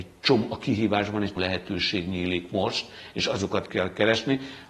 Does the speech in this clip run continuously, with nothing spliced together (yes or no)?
no